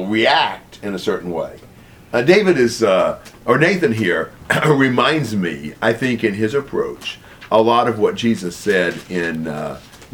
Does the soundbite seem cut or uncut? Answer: uncut